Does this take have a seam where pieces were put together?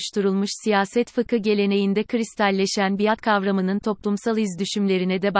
no; 0 cuts

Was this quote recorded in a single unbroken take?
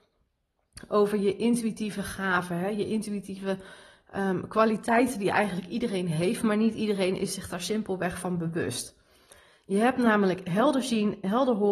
yes; 0 cuts

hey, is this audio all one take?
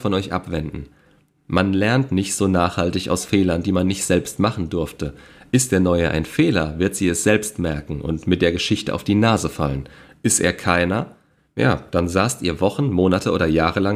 yes; 0 cuts

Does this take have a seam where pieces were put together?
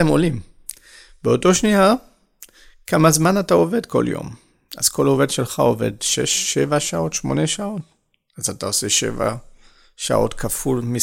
no; 0 cuts

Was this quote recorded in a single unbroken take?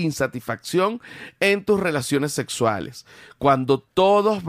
yes; 0 cuts

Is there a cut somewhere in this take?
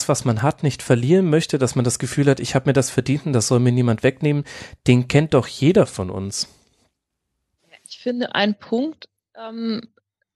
no; 0 cuts

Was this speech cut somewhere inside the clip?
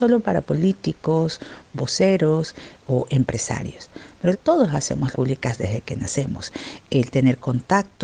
yes; 2 cuts; at 4.3 s, 5.1 s

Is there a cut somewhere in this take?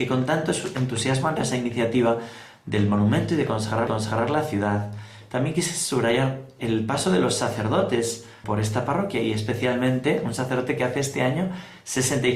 yes; 3 cuts; at 1.4 s, 3.9 s, 8.4 s

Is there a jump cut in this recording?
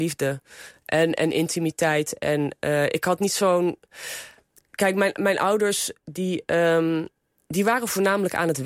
no; 0 cuts

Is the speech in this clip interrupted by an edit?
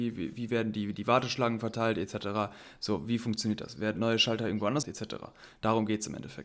yes; 2 cuts; at 4.0 s, 4.8 s

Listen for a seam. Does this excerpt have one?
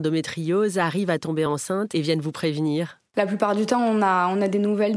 no; 0 cuts

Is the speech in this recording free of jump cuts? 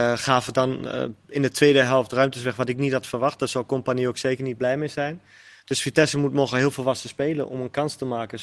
yes; 0 cuts

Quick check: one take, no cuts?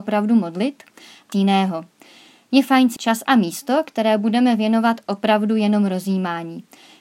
no; 2 cuts; at 1.3 s, 3.0 s

